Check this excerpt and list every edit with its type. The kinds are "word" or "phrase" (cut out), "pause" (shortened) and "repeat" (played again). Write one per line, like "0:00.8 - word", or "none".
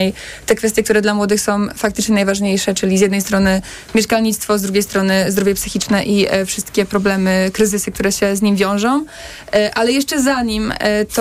none